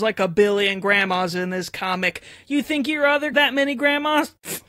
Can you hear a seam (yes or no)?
yes